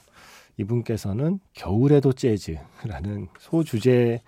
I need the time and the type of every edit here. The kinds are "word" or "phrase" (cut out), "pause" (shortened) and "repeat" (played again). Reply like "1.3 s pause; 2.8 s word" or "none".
1.5 s pause; 3.4 s pause